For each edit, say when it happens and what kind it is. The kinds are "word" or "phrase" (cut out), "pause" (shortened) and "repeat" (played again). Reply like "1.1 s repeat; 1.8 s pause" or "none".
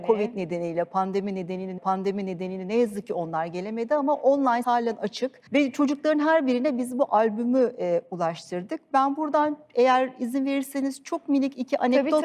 1.8 s repeat; 4.6 s word; 5.5 s pause